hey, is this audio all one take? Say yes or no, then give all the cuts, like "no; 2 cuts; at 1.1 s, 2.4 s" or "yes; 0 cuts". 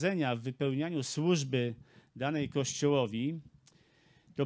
yes; 0 cuts